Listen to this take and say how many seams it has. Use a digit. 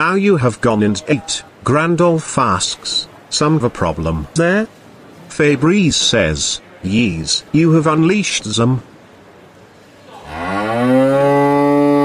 5